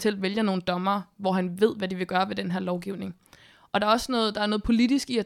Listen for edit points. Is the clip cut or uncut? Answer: uncut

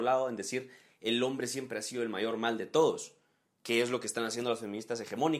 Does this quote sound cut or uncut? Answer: uncut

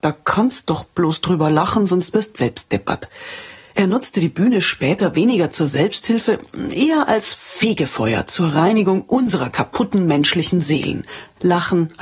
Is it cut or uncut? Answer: uncut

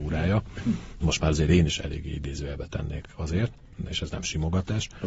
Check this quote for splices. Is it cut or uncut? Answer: cut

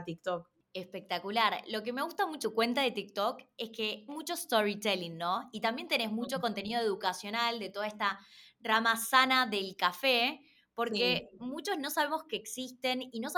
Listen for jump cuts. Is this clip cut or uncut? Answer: cut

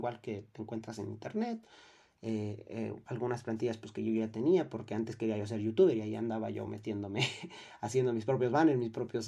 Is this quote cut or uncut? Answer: uncut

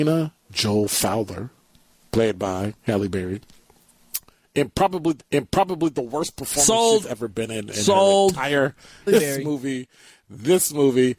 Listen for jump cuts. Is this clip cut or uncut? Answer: cut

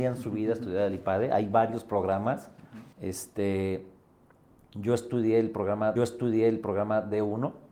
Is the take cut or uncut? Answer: cut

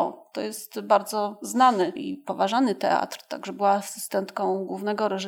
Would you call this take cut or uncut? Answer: uncut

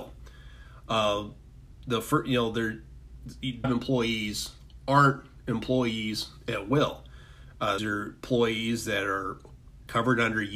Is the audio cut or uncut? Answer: cut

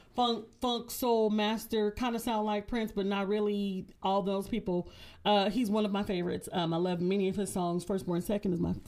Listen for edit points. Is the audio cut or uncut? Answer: uncut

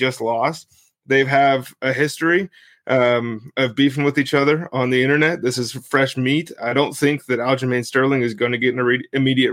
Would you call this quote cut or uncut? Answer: uncut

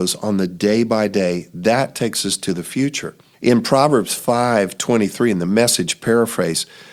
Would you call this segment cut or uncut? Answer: cut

